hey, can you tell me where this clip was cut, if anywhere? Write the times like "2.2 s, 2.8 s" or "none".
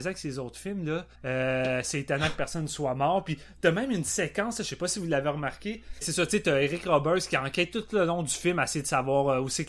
1.1 s, 6.0 s